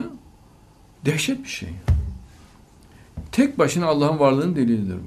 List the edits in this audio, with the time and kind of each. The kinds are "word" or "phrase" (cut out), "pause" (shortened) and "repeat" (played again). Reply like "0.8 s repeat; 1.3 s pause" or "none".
none